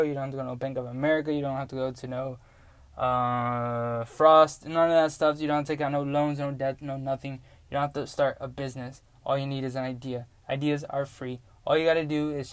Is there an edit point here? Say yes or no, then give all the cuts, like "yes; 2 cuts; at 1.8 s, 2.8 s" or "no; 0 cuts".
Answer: no; 0 cuts